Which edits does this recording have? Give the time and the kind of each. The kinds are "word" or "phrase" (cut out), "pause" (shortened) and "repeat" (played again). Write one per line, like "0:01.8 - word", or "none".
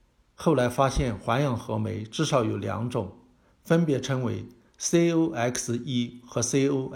none